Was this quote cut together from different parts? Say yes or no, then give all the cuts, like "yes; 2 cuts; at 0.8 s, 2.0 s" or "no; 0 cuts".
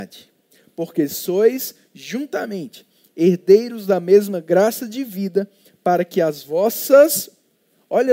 no; 0 cuts